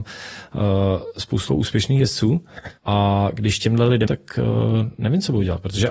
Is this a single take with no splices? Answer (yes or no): no